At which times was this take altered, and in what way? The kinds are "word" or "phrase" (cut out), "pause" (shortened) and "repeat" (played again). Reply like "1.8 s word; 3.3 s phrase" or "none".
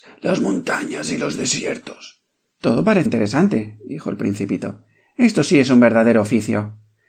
3.1 s word